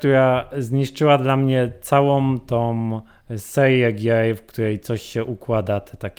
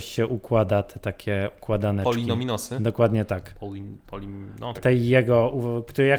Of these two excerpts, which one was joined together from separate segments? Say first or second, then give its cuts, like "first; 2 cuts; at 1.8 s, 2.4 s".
second; 1 cut; at 4.7 s